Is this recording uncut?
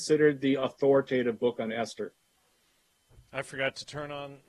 yes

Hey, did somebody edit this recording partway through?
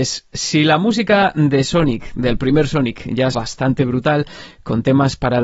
yes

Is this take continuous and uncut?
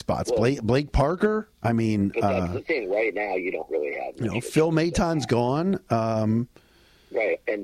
yes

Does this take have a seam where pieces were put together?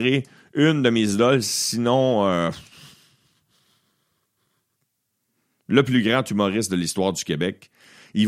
no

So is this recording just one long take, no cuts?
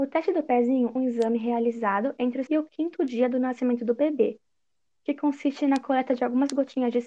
no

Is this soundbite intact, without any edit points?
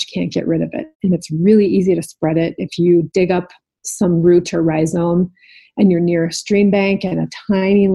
no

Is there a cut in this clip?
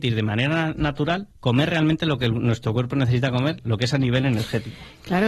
yes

